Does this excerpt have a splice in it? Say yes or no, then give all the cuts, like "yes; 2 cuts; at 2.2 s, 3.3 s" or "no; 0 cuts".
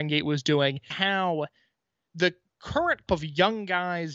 yes; 2 cuts; at 0.9 s, 3.1 s